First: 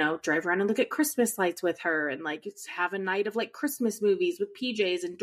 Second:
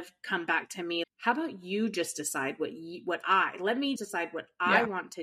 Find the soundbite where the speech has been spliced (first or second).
second